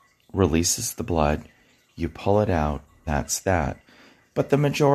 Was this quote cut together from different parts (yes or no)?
yes